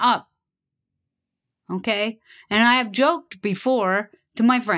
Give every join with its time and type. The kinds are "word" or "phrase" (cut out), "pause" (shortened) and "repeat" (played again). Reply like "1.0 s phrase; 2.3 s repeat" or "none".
none